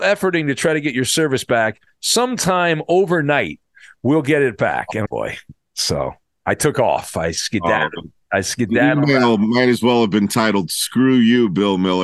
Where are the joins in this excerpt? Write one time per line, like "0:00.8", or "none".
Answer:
0:05.1

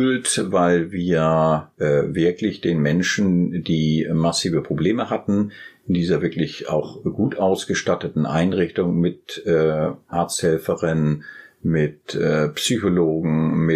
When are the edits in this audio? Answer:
0:01.7

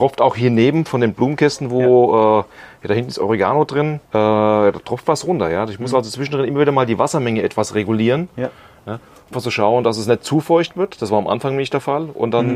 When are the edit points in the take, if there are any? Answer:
0:04.1
0:09.3

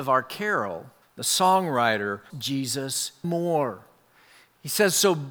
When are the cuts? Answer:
0:01.0
0:02.3
0:03.2

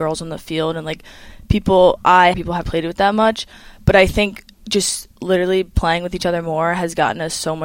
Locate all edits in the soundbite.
0:02.3
0:02.6
0:05.2

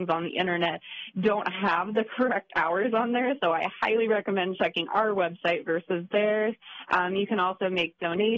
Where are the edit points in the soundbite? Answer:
none

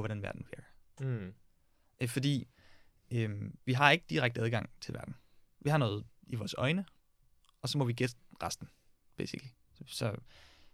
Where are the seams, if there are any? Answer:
none

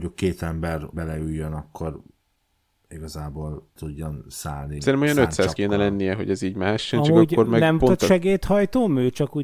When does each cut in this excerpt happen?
0:00.9
0:03.8
0:04.8
0:05.6
0:07.8

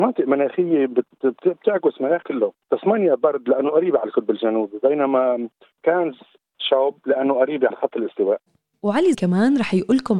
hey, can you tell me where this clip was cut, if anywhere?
0:02.2
0:07.7
0:09.1

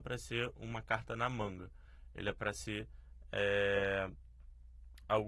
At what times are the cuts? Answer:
none

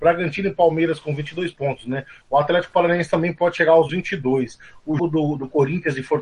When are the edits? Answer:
0:03.9
0:05.0

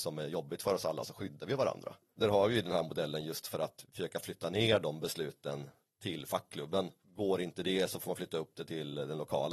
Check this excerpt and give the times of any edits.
none

